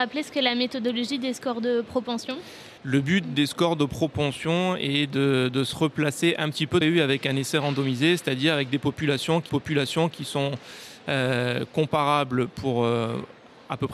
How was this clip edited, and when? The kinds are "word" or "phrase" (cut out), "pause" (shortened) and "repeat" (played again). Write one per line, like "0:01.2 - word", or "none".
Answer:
0:02.8 - pause
0:06.8 - phrase
0:09.5 - repeat